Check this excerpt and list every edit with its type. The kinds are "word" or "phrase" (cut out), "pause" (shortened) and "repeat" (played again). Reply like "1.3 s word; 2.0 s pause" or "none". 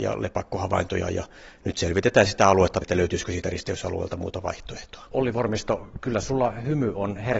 2.8 s word